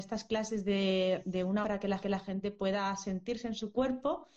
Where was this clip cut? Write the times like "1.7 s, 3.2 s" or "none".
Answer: 1.6 s, 2.0 s